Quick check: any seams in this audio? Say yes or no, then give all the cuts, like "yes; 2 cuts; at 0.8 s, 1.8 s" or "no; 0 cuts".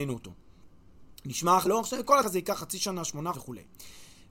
yes; 3 cuts; at 1.7 s, 2.2 s, 3.3 s